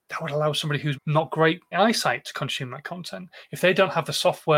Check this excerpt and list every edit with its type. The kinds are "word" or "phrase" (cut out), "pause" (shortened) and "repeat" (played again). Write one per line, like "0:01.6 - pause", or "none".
0:00.9 - word
0:01.7 - phrase